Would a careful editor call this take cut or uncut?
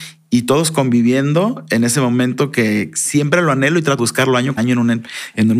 cut